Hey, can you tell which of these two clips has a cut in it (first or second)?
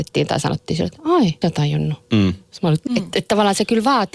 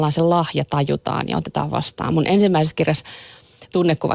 first